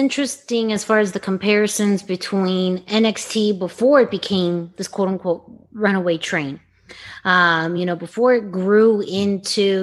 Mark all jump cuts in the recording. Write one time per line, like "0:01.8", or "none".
none